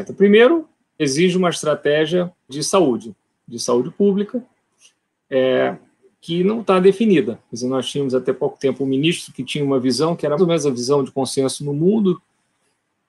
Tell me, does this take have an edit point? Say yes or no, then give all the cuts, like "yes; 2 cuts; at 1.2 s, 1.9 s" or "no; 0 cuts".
yes; 3 cuts; at 1.0 s, 2.5 s, 10.4 s